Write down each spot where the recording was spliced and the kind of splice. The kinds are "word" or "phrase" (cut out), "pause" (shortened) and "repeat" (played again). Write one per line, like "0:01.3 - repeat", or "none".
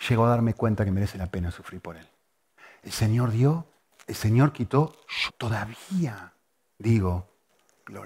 0:05.3 - word